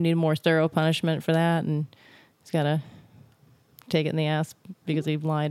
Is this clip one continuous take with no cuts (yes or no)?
yes